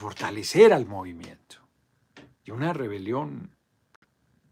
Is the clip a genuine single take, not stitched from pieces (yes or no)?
no